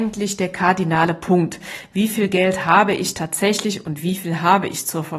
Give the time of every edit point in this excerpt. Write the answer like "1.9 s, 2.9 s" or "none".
none